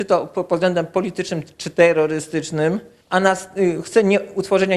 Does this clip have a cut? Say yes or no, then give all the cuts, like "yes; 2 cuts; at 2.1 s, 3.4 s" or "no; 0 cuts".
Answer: yes; 1 cut; at 3.0 s